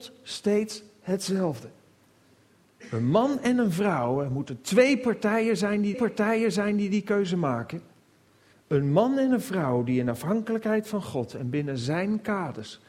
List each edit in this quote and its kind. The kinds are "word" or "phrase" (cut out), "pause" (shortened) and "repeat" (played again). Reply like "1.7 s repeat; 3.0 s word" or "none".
5.9 s repeat